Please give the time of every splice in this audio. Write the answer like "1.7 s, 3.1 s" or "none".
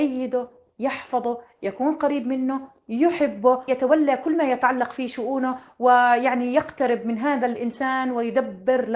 3.7 s